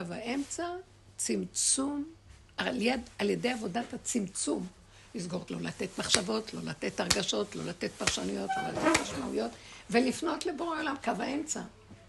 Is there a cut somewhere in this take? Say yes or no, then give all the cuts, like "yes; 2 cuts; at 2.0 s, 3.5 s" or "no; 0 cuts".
yes; 1 cut; at 5.5 s